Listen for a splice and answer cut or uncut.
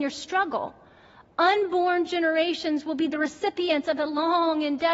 uncut